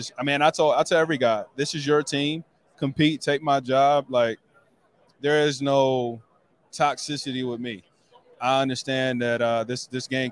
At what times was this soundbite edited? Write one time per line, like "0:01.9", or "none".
none